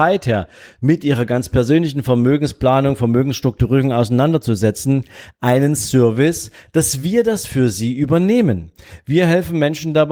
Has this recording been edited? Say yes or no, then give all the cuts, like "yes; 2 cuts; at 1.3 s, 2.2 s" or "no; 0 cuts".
no; 0 cuts